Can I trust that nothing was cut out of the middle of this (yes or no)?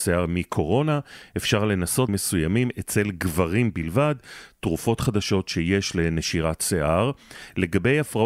no